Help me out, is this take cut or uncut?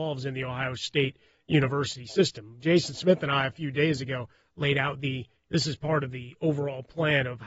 uncut